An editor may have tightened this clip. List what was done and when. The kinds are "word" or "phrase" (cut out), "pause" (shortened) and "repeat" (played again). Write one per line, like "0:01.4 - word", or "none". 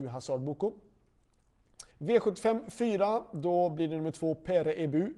0:01.9 - pause